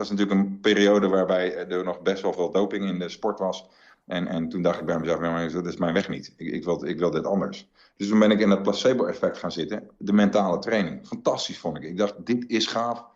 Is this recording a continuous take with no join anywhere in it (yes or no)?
yes